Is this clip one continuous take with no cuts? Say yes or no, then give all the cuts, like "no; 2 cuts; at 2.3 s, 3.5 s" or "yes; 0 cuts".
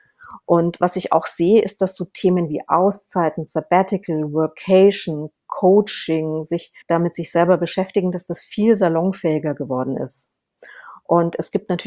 no; 1 cut; at 6.8 s